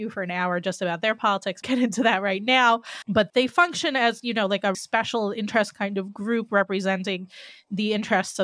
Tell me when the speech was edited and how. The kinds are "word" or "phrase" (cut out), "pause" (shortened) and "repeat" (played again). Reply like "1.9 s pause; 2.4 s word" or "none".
1.6 s phrase; 3.3 s word; 4.7 s word